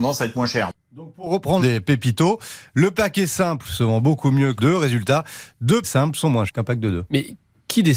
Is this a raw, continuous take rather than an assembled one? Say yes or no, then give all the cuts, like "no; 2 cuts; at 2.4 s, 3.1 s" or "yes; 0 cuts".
no; 4 cuts; at 1.6 s, 4.6 s, 5.8 s, 6.5 s